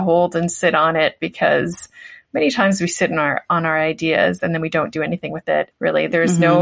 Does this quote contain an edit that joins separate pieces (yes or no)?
no